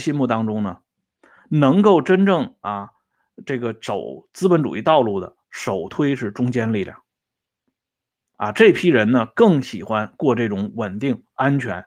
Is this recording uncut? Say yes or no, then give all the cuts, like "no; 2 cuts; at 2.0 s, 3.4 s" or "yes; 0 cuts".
yes; 0 cuts